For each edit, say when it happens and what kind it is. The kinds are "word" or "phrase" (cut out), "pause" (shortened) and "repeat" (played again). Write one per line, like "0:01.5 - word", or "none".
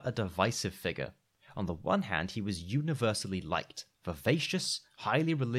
0:03.9 - pause